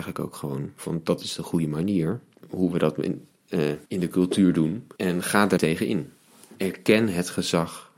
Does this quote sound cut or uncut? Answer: cut